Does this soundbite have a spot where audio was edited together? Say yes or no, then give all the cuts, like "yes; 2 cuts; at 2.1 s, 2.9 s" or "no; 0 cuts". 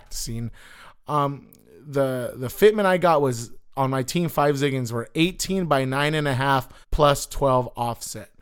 yes; 1 cut; at 6.8 s